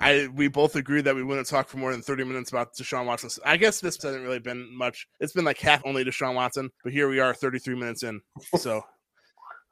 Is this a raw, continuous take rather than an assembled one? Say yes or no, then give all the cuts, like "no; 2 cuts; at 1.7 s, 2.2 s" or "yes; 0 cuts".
no; 4 cuts; at 4.0 s, 5.1 s, 5.8 s, 6.8 s